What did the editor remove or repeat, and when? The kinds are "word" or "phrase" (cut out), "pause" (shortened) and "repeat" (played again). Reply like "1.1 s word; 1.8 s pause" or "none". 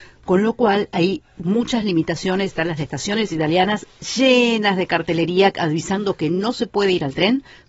none